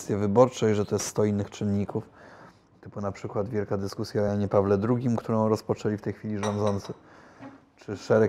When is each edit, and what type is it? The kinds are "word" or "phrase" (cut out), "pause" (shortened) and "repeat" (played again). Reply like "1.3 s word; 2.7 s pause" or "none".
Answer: none